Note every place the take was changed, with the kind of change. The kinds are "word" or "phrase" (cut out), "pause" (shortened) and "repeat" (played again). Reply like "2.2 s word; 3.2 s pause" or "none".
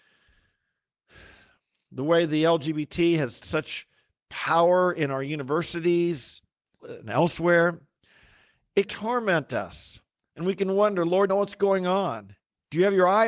3.4 s word; 6.8 s word; 8.9 s word; 11.3 s phrase